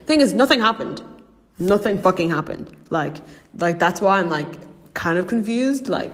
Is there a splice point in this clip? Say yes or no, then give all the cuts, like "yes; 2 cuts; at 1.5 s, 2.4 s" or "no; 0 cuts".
no; 0 cuts